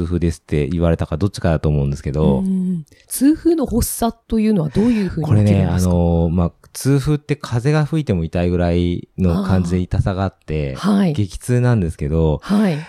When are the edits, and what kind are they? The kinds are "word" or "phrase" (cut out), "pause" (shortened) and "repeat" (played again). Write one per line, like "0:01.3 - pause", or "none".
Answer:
0:04.2 - pause